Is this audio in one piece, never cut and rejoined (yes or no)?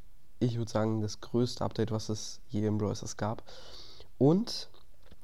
yes